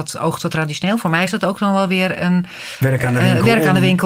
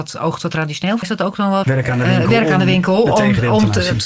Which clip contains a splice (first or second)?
second